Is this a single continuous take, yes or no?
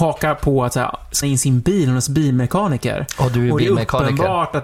no